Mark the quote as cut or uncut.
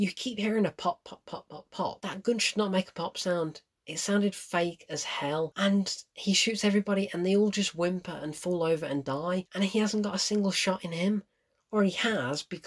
uncut